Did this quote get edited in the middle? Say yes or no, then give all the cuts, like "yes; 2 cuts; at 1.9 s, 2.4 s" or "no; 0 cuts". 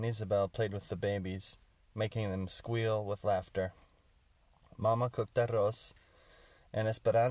no; 0 cuts